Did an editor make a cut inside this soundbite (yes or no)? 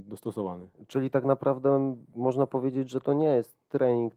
no